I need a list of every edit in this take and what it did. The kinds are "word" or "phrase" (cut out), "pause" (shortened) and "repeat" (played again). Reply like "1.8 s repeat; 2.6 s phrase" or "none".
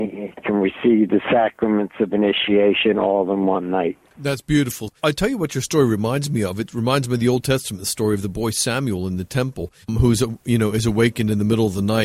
5.0 s pause; 9.8 s pause